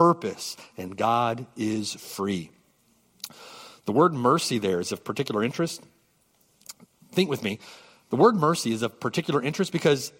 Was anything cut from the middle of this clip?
no; 0 cuts

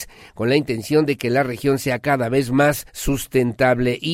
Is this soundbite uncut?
no; 1 cut; at 2.9 s

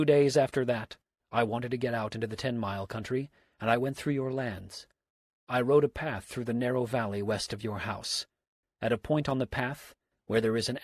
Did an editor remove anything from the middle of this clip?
no; 0 cuts

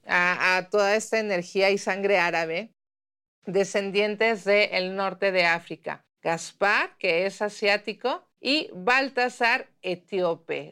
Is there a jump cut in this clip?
yes; 2 cuts; at 6.1 s, 8.3 s

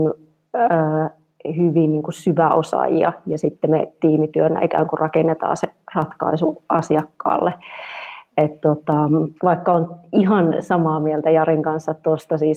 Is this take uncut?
no; 1 cut; at 9.4 s

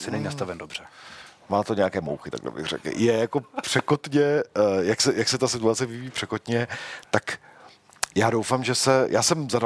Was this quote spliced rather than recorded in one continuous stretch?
no; 0 cuts

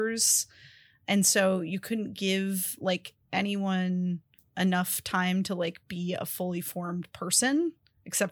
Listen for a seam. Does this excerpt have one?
no; 0 cuts

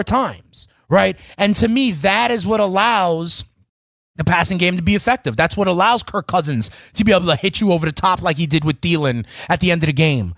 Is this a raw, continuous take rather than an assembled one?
yes; 0 cuts

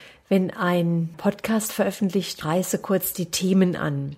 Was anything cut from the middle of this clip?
yes; 2 cuts; at 1.1 s, 2.4 s

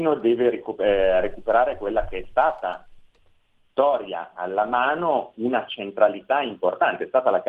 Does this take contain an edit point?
no; 0 cuts

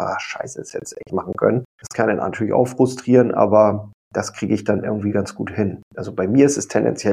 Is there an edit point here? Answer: yes; 4 cuts; at 1.1 s, 1.7 s, 4.0 s, 5.8 s

